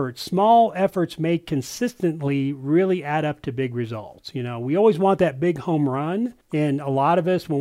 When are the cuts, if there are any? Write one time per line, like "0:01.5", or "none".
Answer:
0:06.4